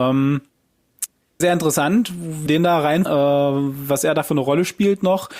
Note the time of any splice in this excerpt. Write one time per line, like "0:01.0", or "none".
0:01.4
0:02.5
0:03.1